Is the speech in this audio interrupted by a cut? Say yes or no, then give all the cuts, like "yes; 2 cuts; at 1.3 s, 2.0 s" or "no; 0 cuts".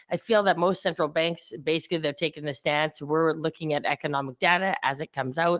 no; 0 cuts